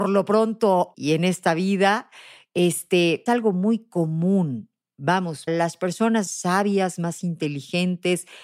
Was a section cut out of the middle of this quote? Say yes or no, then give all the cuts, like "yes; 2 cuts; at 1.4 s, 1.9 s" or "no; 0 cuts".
yes; 4 cuts; at 0.9 s, 3.3 s, 5.5 s, 6.3 s